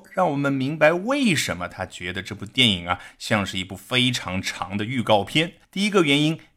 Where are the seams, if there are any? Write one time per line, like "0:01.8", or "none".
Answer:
0:05.6